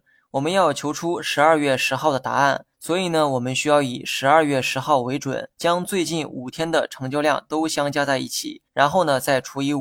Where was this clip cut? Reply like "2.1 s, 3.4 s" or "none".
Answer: 2.7 s, 5.5 s, 8.7 s